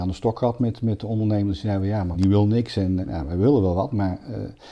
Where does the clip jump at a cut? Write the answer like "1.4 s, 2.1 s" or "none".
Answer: 2.1 s, 3.0 s